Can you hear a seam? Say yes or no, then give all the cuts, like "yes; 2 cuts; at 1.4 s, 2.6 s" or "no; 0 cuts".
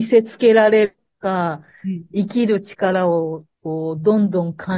yes; 1 cut; at 3.5 s